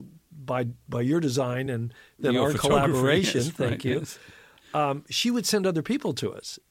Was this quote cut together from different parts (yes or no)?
no